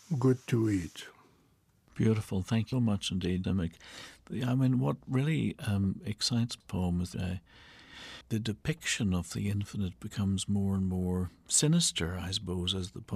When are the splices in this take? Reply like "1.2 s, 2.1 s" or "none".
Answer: 2.7 s, 3.4 s, 6.6 s, 7.1 s, 8.2 s